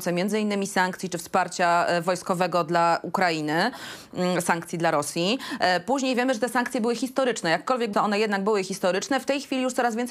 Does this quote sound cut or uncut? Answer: cut